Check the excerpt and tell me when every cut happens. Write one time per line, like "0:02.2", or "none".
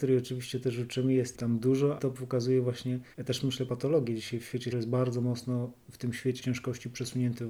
0:01.3
0:02.0
0:03.1
0:03.7
0:04.7
0:06.4

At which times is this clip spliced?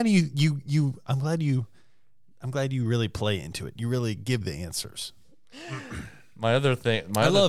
0:04.4

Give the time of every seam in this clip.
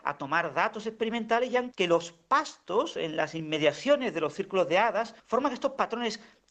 0:01.7
0:05.2

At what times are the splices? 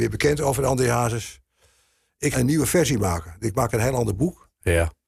0:02.3

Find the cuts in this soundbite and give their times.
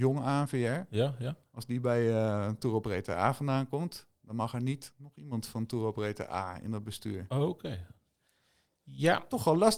none

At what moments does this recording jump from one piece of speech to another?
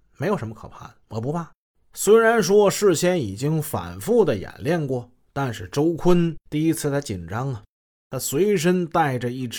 0:01.0
0:01.7
0:06.4

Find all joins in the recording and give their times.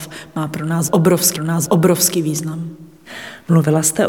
0:01.4

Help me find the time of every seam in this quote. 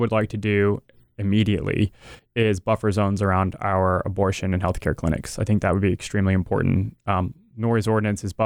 none

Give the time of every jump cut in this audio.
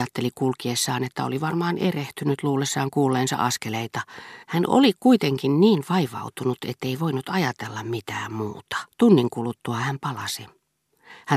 0:04.4
0:08.9

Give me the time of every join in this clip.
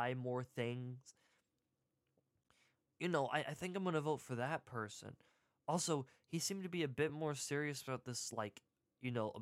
none

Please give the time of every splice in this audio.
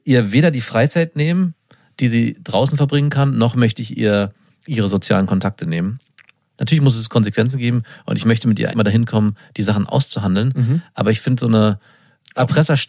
0:08.7

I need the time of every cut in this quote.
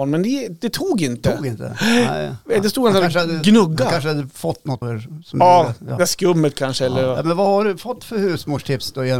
0:04.8

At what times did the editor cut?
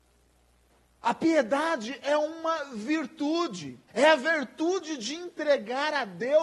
0:03.9

